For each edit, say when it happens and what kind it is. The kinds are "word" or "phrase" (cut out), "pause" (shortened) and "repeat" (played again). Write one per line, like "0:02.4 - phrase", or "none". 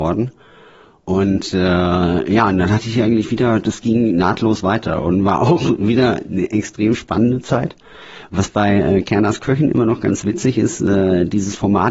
none